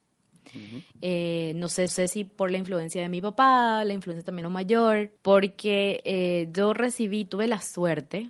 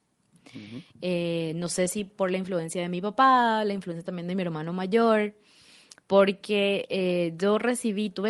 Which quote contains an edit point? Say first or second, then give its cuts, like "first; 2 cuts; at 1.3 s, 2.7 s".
first; 3 cuts; at 1.9 s, 4.4 s, 5.2 s